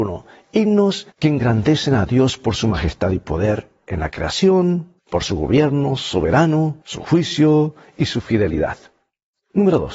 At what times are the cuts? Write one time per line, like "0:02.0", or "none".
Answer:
0:01.1
0:05.0
0:06.8